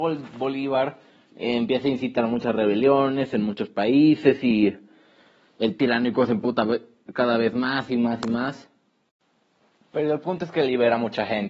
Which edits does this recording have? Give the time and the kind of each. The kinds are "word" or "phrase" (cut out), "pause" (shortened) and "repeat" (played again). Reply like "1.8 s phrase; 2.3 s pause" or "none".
none